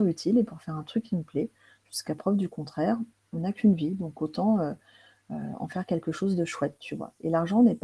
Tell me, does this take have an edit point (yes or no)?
no